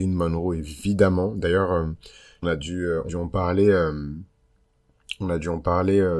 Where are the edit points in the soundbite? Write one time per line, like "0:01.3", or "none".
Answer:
0:02.4
0:03.1